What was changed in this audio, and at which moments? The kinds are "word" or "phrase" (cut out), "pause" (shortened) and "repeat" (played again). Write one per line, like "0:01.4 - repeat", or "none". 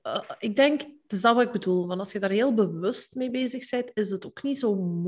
none